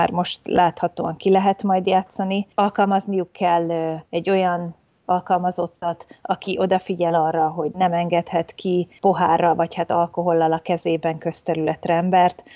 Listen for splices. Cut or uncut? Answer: cut